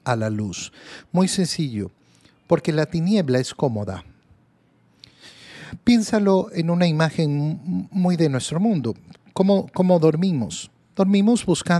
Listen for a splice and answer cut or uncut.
uncut